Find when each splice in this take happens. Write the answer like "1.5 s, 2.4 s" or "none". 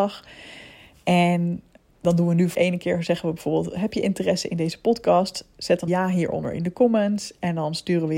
1.9 s, 2.5 s, 5.9 s